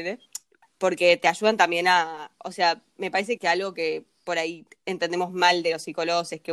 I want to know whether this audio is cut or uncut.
cut